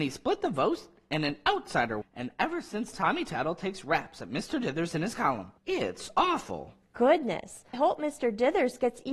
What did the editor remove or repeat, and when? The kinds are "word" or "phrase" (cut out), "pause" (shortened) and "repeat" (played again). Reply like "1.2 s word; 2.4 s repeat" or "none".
2.0 s word; 2.9 s word; 5.6 s pause; 7.7 s word